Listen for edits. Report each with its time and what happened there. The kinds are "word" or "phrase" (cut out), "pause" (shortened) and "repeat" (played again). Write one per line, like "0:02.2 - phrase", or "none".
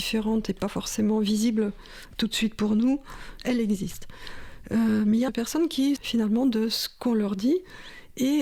0:05.3 - phrase
0:06.0 - word